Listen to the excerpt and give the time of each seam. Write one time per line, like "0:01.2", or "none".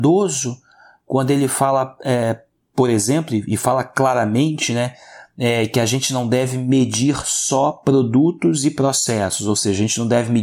none